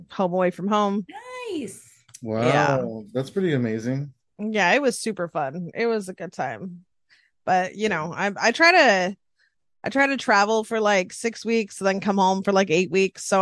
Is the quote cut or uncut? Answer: uncut